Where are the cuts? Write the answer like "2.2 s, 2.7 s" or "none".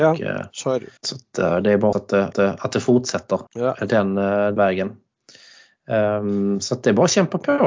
1.0 s, 1.9 s, 2.3 s, 3.5 s, 4.6 s